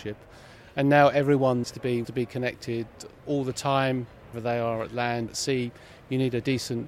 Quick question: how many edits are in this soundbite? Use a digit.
4